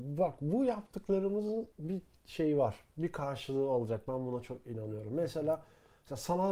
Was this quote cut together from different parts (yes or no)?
yes